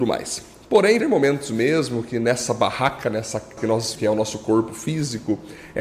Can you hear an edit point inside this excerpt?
yes; 3 cuts; at 1.0 s, 3.6 s, 4.0 s

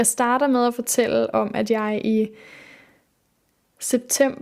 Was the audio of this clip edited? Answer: no; 0 cuts

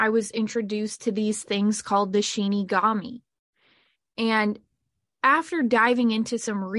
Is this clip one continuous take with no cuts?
yes; 0 cuts

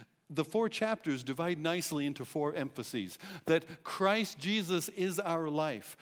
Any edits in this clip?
no; 0 cuts

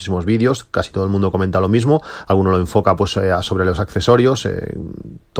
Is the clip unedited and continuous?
yes; 0 cuts

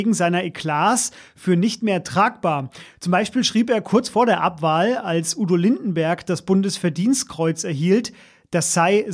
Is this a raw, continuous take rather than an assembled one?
yes; 0 cuts

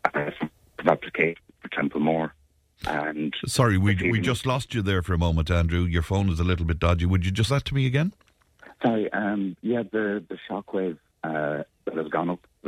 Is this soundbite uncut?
no; 1 cut; at 7.5 s

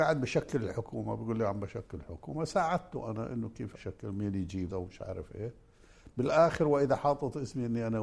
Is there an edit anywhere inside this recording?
yes; 2 cuts; at 3.7 s, 4.7 s

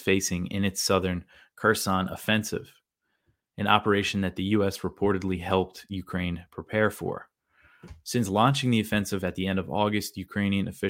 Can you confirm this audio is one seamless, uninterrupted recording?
yes; 0 cuts

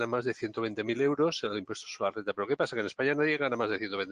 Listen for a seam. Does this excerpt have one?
no; 0 cuts

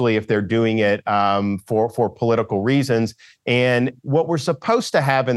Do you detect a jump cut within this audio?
no; 0 cuts

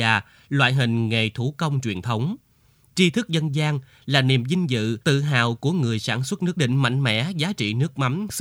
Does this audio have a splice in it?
yes; 2 cuts; at 5.0 s, 6.6 s

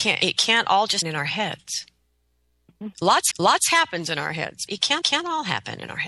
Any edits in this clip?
yes; 4 cuts; at 1.0 s, 3.3 s, 4.7 s, 5.0 s

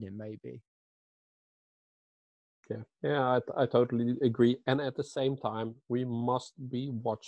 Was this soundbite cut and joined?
no; 0 cuts

